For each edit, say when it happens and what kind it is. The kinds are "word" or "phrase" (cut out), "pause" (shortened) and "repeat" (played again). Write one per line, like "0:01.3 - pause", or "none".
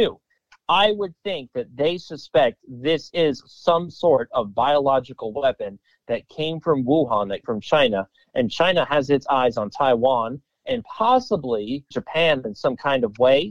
0:07.4 - word
0:11.9 - word